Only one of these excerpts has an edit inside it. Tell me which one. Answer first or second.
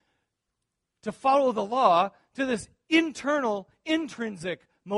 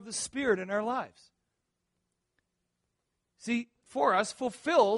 second